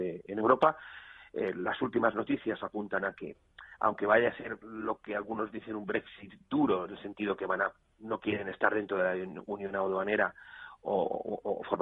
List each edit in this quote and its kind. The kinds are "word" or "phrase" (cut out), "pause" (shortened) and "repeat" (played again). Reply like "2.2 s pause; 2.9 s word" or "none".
none